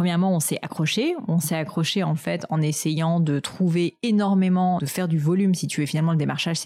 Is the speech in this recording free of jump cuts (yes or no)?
no